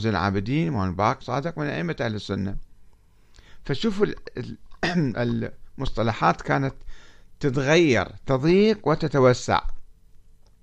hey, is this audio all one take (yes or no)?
no